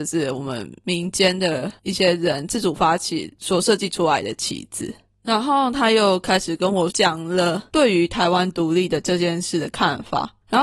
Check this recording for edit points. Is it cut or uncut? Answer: uncut